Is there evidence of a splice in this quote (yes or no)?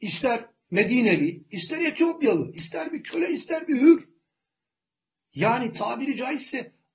no